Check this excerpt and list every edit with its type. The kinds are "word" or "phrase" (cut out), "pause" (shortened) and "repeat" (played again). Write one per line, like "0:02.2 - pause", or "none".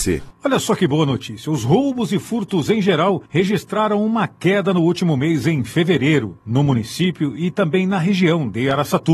0:03.3 - pause
0:06.4 - pause